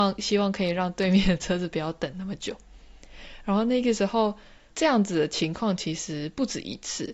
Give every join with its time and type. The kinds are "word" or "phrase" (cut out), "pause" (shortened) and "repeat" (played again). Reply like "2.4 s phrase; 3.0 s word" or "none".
4.7 s word

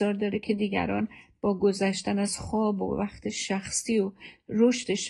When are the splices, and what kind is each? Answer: none

